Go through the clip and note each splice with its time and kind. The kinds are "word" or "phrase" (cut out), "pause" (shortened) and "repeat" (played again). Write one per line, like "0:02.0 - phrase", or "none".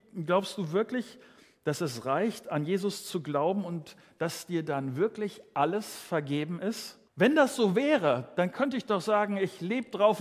0:07.1 - pause